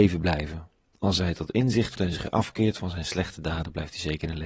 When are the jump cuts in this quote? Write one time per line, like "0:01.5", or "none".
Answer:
0:02.0